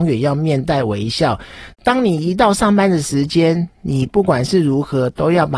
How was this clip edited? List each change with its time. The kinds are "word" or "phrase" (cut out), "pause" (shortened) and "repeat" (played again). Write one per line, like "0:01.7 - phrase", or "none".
0:01.7 - pause